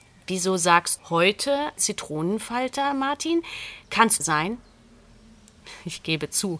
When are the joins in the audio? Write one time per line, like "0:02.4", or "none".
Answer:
0:01.0
0:01.8
0:04.2